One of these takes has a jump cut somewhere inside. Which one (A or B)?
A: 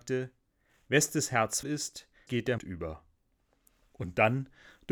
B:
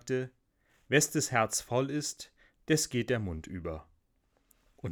A